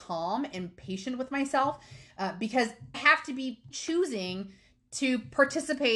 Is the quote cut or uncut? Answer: cut